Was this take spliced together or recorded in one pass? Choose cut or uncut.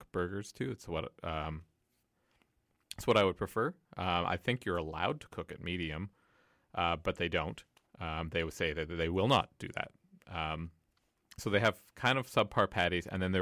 uncut